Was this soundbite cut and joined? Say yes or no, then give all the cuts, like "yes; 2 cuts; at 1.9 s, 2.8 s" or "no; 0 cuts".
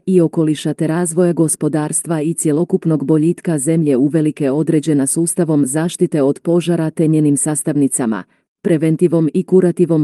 no; 0 cuts